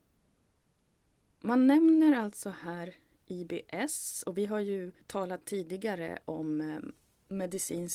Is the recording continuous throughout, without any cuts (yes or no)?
yes